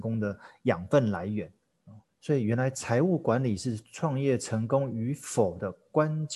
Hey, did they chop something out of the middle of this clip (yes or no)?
yes